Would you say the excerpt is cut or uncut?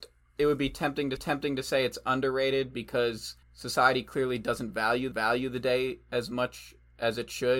cut